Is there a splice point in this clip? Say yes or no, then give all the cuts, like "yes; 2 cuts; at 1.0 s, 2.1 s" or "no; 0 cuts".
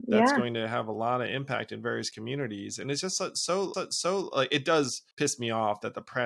yes; 2 cuts; at 3.7 s, 5.1 s